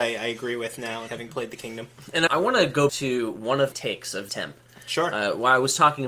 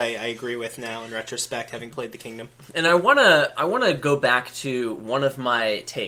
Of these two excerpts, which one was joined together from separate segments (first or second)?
first